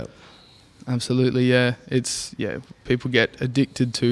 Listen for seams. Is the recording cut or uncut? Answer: uncut